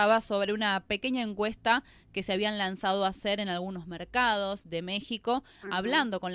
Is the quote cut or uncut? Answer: uncut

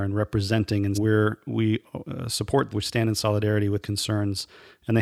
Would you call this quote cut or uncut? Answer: cut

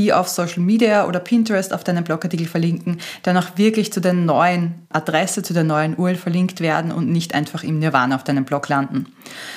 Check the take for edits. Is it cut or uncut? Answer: cut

